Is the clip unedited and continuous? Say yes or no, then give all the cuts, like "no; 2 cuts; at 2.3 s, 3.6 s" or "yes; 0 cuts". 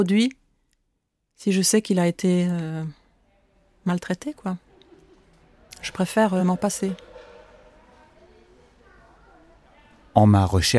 yes; 0 cuts